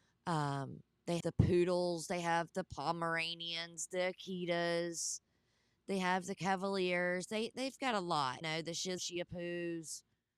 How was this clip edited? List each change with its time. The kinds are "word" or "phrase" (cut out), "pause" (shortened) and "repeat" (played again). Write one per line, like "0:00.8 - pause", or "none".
0:01.2 - word
0:08.4 - word
0:09.0 - word

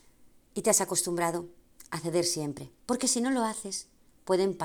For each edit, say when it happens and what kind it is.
0:02.8 - pause

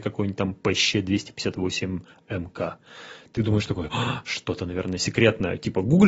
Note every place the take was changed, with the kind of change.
none

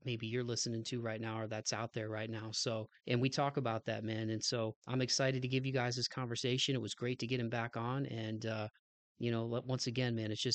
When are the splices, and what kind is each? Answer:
0:03.0 - pause
0:04.8 - pause

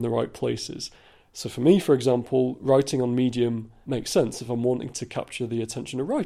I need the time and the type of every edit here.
0:03.9 - word

